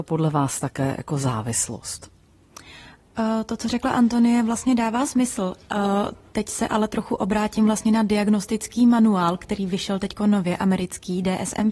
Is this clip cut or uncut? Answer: uncut